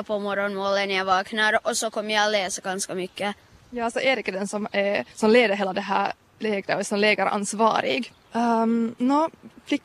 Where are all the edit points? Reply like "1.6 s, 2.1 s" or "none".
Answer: 3.5 s, 5.1 s, 8.2 s

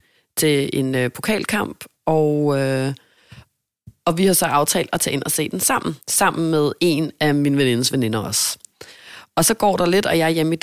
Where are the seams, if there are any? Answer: 6.0 s

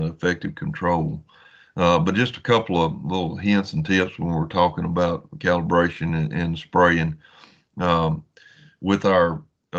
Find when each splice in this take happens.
none

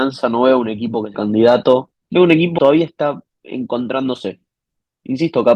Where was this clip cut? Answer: 1.1 s, 2.0 s, 2.6 s, 3.3 s

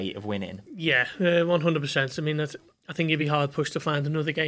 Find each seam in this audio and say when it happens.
none

